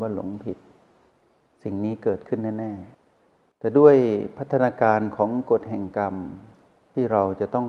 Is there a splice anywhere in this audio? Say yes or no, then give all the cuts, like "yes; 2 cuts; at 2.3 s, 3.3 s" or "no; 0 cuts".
yes; 1 cut; at 2.9 s